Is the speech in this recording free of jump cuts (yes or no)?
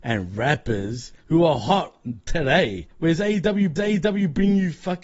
no